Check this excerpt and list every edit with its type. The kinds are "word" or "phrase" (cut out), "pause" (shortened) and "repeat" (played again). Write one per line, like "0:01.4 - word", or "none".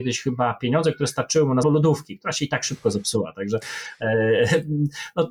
0:01.6 - phrase